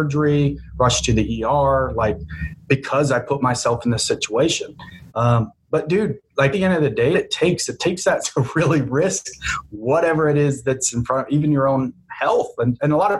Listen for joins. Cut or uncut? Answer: cut